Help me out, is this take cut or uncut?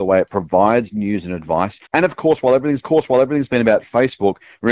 cut